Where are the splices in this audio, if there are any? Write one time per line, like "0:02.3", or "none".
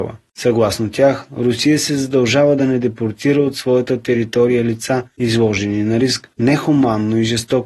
none